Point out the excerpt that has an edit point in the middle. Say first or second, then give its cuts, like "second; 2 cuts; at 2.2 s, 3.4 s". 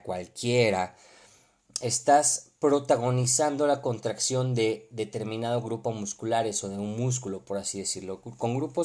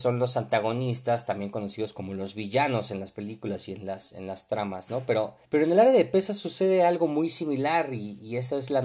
second; 1 cut; at 5.4 s